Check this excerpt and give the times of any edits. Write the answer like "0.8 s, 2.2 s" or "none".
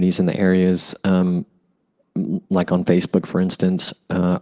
none